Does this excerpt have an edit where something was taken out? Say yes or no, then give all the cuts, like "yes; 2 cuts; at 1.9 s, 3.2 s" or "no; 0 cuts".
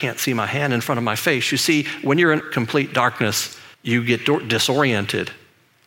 yes; 2 cuts; at 2.4 s, 3.7 s